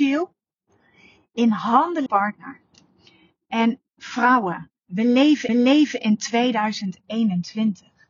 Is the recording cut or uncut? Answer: cut